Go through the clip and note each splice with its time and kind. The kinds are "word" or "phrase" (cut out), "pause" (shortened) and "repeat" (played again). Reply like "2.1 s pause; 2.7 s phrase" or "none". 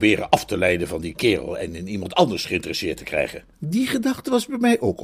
3.5 s pause